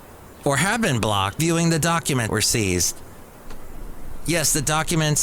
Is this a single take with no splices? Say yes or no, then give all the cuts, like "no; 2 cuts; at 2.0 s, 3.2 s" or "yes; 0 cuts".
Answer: no; 2 cuts; at 1.4 s, 2.3 s